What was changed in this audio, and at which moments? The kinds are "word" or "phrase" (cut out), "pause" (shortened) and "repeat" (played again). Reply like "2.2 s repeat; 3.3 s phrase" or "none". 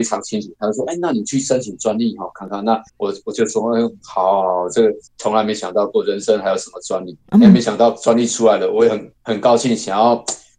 2.9 s pause; 5.1 s pause; 9.2 s pause

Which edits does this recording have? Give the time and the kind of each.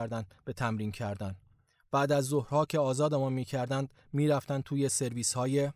none

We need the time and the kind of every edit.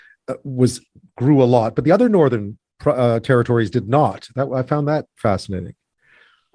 none

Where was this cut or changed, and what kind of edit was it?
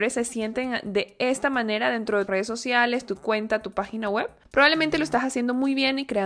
2.3 s word

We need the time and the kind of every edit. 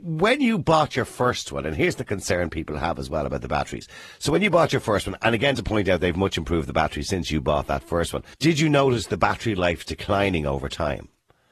8.3 s pause

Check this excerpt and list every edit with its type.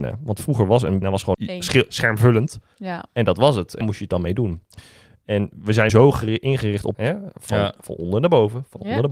1.0 s word; 1.3 s word; 3.8 s word; 5.9 s word; 6.9 s word

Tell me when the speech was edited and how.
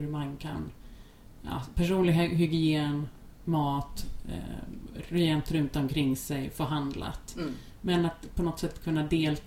none

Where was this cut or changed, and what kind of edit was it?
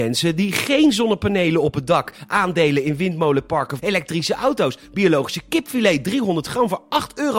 3.8 s phrase

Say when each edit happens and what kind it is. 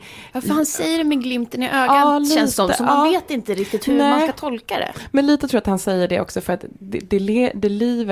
none

